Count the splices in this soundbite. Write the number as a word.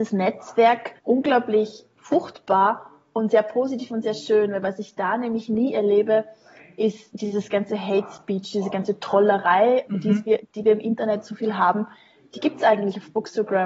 two